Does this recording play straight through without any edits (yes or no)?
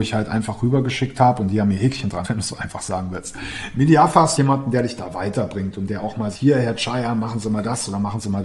no